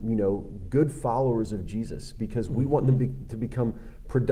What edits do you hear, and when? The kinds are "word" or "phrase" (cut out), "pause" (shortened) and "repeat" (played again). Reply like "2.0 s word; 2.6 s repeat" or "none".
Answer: none